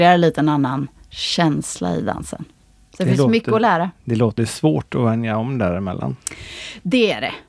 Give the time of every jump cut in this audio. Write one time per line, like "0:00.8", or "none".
0:04.4